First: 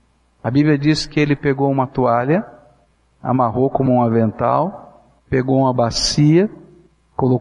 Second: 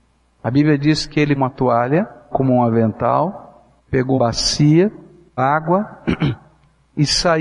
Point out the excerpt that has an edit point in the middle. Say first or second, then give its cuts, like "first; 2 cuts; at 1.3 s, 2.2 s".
second; 4 cuts; at 1.4 s, 2.3 s, 4.2 s, 5.4 s